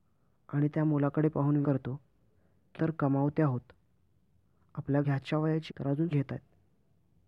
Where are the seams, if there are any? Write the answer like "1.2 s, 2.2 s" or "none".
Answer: 1.6 s, 2.8 s, 5.0 s, 5.7 s, 6.1 s